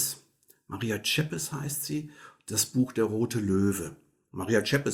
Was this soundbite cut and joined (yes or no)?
no